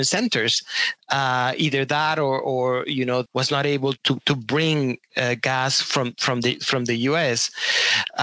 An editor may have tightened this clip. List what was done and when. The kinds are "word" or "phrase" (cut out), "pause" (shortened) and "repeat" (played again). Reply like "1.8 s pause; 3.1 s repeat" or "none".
3.3 s phrase; 4.0 s word